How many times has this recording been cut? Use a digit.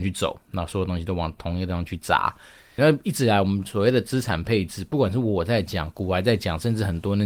1